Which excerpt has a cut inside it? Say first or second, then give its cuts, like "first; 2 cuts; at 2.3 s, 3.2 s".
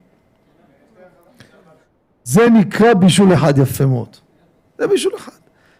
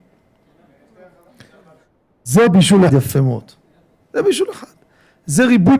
second; 2 cuts; at 2.5 s, 2.9 s